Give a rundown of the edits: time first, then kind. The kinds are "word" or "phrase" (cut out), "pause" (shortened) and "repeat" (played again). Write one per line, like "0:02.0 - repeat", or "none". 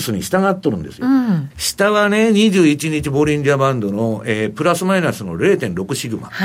0:01.5 - word